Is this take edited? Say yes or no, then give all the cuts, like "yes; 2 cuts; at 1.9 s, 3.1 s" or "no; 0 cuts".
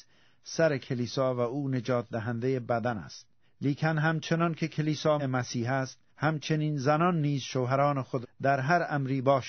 yes; 4 cuts; at 3.4 s, 5.2 s, 6.1 s, 8.2 s